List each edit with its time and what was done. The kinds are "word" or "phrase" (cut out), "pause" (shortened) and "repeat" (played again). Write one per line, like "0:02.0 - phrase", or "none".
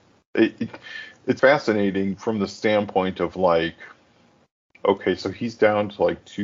0:01.4 - word